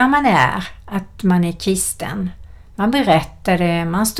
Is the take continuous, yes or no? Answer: yes